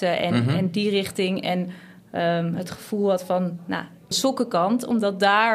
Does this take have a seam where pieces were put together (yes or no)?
yes